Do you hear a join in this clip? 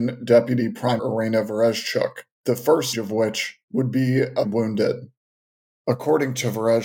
yes; 5 cuts; at 1.0 s, 2.3 s, 2.9 s, 3.6 s, 4.4 s

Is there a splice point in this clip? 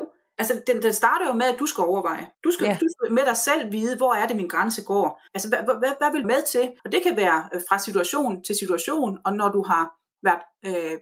yes; 4 cuts; at 2.3 s, 5.3 s, 6.2 s, 6.8 s

